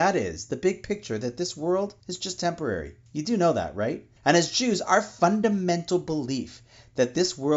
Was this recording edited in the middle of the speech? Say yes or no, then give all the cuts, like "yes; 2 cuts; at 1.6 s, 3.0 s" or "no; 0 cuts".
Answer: yes; 3 cuts; at 2.0 s, 3.1 s, 4.2 s